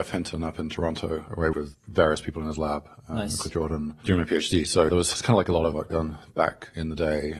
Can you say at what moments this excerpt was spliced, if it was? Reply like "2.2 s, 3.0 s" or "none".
1.5 s, 3.5 s, 4.9 s, 5.7 s